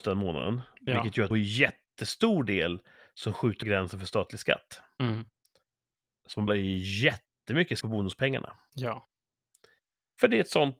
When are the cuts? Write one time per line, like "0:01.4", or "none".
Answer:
0:01.3
0:03.6
0:06.5
0:07.8